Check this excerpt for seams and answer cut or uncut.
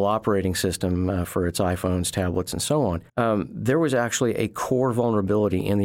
cut